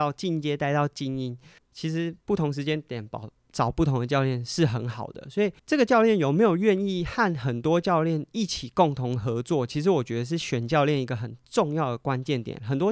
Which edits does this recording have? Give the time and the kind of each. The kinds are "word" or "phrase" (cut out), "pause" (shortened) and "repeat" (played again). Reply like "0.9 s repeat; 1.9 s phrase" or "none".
1.6 s pause; 2.2 s pause; 5.6 s pause